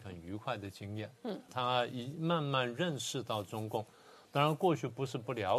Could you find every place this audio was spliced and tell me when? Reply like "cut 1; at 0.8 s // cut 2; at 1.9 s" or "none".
cut 1; at 1.5 s